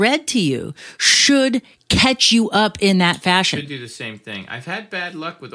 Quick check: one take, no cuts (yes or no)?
yes